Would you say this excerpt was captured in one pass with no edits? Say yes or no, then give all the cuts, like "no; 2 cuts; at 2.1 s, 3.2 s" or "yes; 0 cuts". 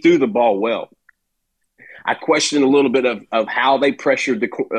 yes; 0 cuts